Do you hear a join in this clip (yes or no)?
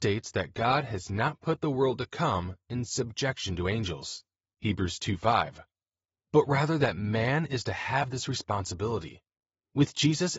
yes